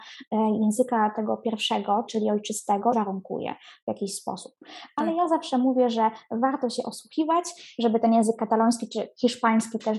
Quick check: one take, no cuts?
no; 2 cuts; at 2.1 s, 2.9 s

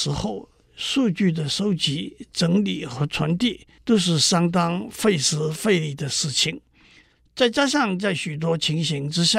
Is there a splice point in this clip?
yes; 1 cut; at 3.8 s

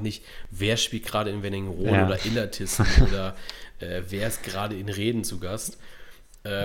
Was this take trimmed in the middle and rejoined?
no; 0 cuts

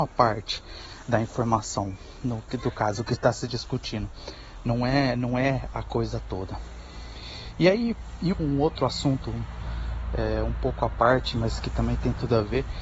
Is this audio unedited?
no; 1 cut; at 8.3 s

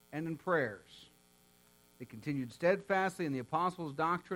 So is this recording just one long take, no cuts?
yes; 0 cuts

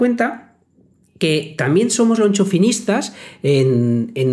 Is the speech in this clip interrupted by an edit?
no; 0 cuts

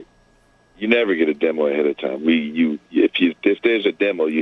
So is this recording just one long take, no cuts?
yes; 0 cuts

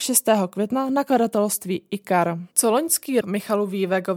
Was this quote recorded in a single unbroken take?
no; 1 cut; at 3.2 s

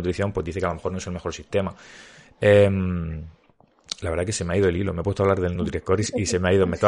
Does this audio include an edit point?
no; 0 cuts

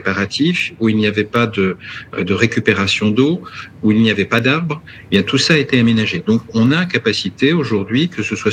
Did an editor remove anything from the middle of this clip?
no; 0 cuts

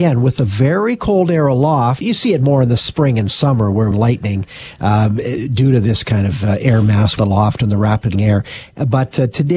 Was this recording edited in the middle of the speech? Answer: yes; 4 cuts; at 2.0 s, 3.9 s, 7.2 s, 8.1 s

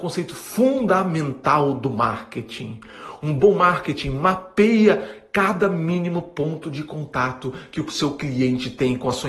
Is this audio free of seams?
yes; 0 cuts

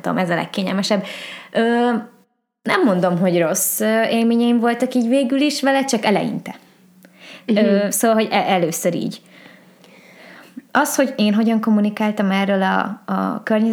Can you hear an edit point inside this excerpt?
no; 0 cuts

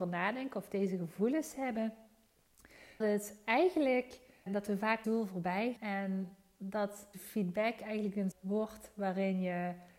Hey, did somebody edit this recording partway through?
yes; 6 cuts; at 3.0 s, 4.5 s, 5.0 s, 5.8 s, 7.1 s, 8.3 s

